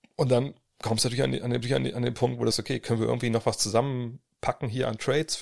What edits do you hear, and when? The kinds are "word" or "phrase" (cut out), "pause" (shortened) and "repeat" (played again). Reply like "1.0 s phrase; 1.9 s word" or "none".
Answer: 1.6 s repeat; 2.5 s word